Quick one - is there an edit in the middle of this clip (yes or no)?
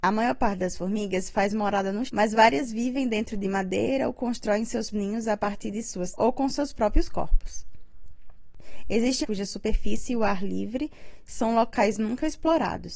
yes